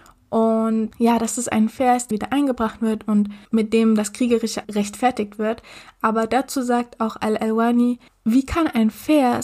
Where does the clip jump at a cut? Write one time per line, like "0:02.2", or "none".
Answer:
0:02.1
0:03.5
0:04.6
0:08.1